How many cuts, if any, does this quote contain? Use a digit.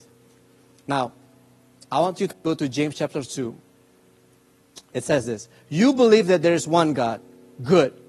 0